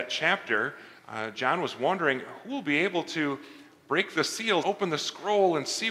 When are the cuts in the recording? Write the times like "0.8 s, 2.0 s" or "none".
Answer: 1.0 s, 4.6 s